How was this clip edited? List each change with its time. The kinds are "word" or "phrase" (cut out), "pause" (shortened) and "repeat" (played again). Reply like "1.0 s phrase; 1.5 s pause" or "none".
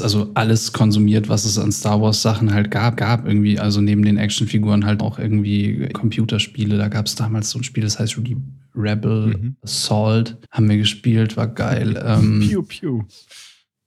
3.0 s repeat; 5.0 s word; 5.9 s word; 10.4 s pause